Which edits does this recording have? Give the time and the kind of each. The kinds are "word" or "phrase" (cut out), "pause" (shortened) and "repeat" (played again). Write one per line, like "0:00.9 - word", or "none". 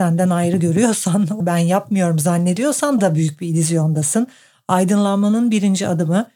0:01.4 - word
0:03.0 - word